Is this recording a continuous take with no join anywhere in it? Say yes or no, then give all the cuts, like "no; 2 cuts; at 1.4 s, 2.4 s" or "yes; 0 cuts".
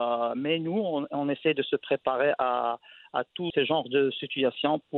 yes; 0 cuts